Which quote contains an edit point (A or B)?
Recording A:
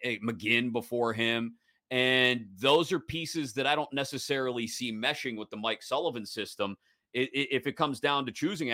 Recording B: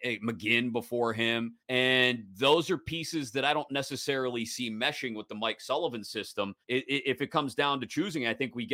B